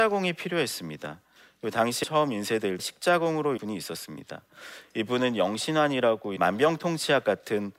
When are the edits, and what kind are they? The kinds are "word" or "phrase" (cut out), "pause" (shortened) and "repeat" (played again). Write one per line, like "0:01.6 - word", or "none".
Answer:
0:02.0 - phrase
0:02.8 - word
0:03.6 - phrase
0:06.4 - phrase